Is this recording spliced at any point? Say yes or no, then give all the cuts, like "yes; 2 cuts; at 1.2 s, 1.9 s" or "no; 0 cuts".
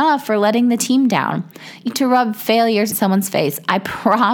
yes; 2 cuts; at 1.9 s, 2.9 s